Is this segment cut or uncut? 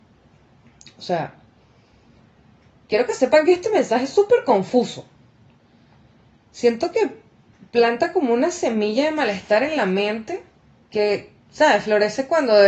cut